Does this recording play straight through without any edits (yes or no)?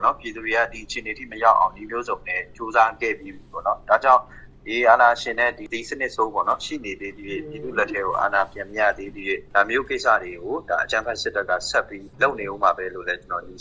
no